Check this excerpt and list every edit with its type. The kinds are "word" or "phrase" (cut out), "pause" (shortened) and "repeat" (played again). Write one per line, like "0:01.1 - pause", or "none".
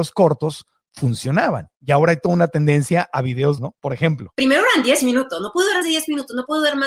0:01.7 - pause
0:03.6 - word
0:05.8 - word